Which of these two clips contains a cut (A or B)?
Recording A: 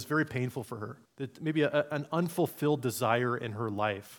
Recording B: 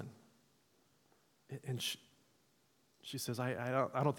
A